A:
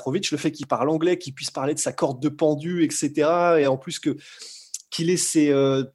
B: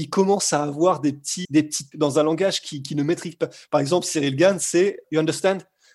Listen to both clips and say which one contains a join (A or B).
B